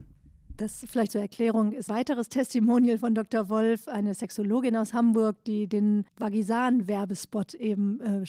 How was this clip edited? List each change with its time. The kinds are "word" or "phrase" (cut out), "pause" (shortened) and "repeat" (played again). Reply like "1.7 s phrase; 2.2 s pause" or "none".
1.1 s word; 1.9 s word; 6.1 s pause